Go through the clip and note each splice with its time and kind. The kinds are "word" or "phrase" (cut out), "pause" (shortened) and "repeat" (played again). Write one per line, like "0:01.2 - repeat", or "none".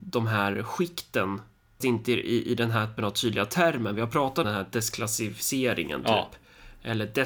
0:01.8 - word
0:03.0 - word
0:04.4 - word